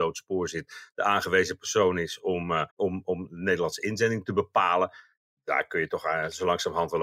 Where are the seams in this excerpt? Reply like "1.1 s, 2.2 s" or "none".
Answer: 2.7 s

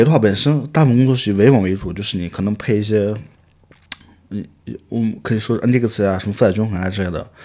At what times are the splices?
none

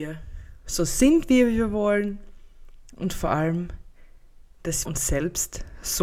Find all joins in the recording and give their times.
4.9 s

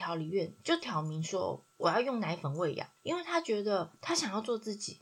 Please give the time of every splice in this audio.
3.0 s

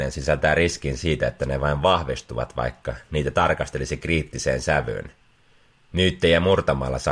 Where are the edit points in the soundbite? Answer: none

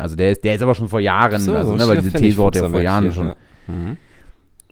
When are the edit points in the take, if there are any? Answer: none

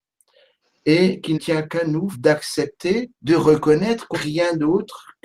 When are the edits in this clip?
1.3 s, 2.1 s, 3.1 s, 4.1 s

